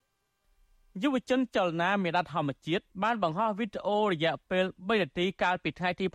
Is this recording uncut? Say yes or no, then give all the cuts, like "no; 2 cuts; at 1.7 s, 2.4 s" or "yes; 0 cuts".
no; 1 cut; at 2.9 s